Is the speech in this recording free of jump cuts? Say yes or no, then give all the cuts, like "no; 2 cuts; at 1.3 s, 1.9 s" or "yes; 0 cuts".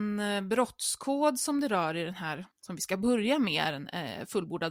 no; 1 cut; at 2.5 s